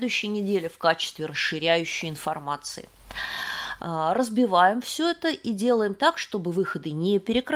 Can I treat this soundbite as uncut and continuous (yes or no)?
yes